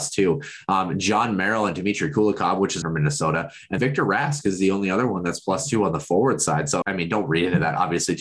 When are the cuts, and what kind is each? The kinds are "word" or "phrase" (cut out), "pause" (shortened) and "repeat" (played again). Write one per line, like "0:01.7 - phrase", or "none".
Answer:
0:02.8 - phrase
0:03.8 - word
0:06.8 - word